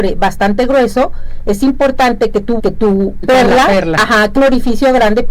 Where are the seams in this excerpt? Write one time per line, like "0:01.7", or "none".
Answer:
0:02.6
0:03.2
0:04.4